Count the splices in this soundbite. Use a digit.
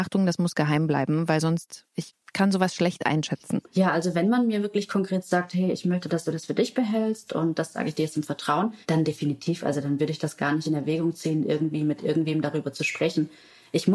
2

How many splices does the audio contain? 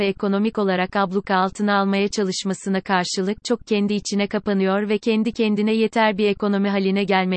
1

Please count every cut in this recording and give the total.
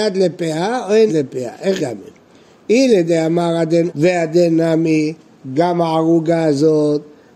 3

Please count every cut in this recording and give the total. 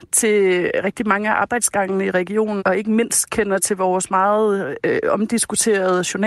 1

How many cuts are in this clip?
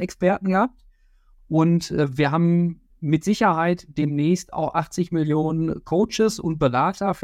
1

